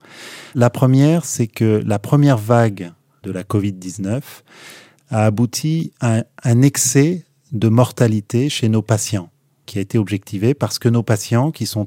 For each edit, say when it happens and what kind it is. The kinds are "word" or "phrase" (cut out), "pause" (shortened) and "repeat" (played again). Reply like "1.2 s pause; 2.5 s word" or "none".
none